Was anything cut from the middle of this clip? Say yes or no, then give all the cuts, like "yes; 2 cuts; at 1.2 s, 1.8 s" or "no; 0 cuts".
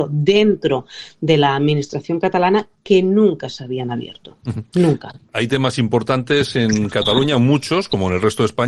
no; 0 cuts